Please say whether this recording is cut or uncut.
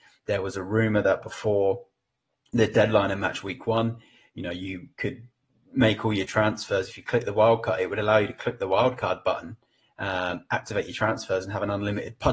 uncut